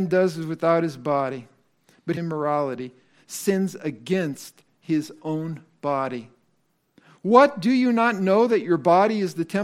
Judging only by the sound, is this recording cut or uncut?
cut